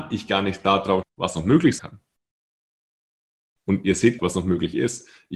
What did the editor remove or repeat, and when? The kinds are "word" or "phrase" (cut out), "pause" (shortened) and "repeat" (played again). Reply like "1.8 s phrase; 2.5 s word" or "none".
1.0 s word; 1.8 s word; 4.2 s word